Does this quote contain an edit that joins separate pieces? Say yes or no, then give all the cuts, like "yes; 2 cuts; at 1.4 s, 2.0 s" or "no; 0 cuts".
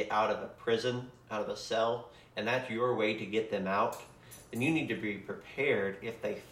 no; 0 cuts